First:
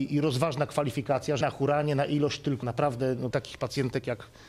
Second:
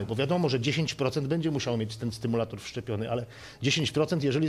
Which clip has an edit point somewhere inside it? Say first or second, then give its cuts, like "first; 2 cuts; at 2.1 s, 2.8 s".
first; 3 cuts; at 1.4 s, 2.6 s, 3.3 s